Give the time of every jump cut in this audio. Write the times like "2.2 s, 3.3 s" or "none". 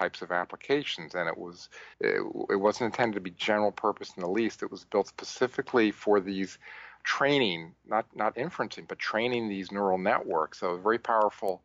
1.9 s